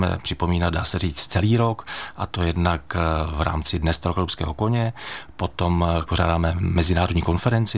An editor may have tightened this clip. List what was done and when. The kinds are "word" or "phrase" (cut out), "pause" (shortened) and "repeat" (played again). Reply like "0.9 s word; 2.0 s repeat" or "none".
6.1 s phrase